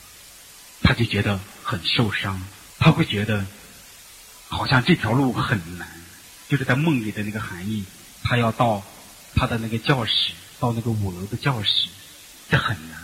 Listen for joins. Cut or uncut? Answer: cut